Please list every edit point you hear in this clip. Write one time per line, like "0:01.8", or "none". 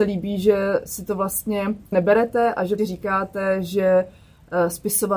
0:01.9
0:02.8